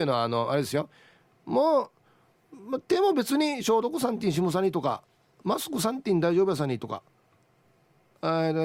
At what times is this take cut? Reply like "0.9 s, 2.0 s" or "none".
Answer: none